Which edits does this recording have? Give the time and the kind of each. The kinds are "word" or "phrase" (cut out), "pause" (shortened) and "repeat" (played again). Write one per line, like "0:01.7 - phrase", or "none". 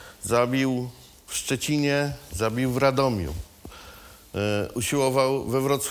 none